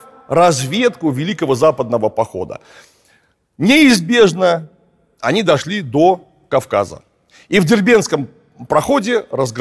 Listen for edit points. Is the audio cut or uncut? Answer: uncut